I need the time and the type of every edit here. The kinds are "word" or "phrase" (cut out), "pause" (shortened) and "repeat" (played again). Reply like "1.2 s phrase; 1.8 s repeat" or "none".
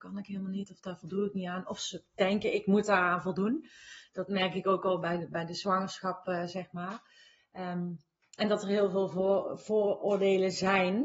none